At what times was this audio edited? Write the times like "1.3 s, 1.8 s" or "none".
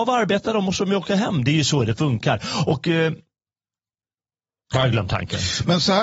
none